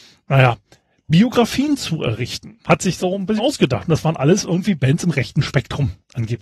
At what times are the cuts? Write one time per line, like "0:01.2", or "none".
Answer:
0:02.7
0:03.4